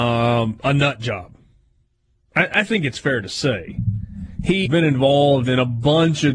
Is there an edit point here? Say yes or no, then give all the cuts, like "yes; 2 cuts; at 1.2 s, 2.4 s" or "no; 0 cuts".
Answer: yes; 1 cut; at 4.7 s